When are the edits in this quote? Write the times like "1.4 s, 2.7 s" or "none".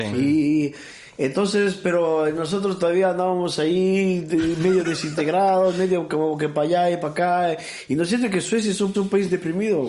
8.9 s